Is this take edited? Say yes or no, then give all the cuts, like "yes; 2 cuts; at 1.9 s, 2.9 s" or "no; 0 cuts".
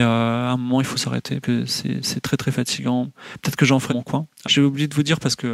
yes; 3 cuts; at 1.4 s, 3.9 s, 4.4 s